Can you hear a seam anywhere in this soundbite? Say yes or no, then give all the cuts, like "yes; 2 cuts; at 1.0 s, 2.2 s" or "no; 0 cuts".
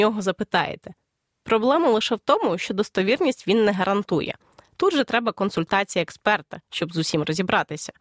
no; 0 cuts